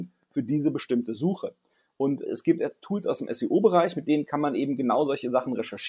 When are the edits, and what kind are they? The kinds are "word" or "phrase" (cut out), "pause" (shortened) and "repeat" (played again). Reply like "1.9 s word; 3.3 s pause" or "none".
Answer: 2.3 s word

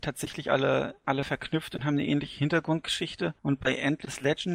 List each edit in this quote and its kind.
3.4 s pause

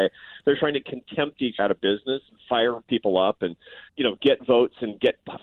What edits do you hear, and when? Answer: 1.6 s word; 3.9 s pause

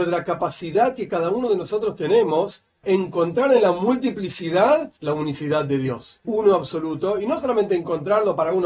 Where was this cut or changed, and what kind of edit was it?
2.8 s word; 5.0 s pause; 6.2 s word

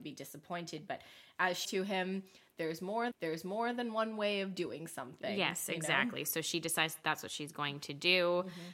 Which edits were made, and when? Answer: 1.6 s word; 3.1 s repeat

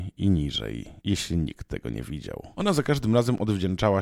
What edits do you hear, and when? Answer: 1.0 s pause; 2.5 s pause

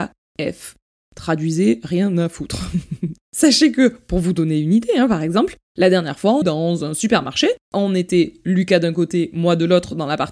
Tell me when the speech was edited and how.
6.4 s word

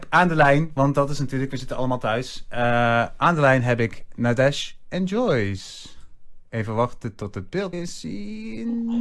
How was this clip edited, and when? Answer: 7.7 s word

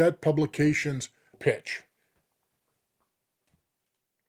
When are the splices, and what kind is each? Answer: 1.3 s word

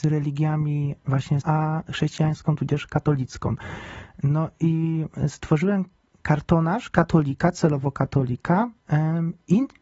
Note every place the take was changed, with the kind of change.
1.4 s word

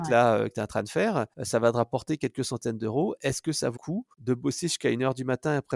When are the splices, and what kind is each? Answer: 1.3 s pause; 3.8 s word; 4.1 s pause

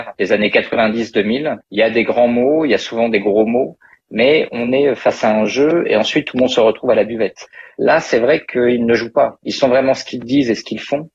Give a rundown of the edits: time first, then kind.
none

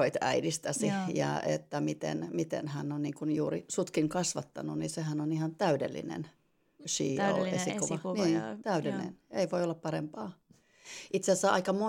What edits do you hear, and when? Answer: 6.8 s word

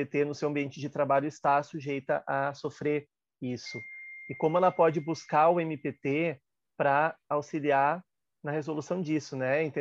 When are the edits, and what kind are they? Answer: none

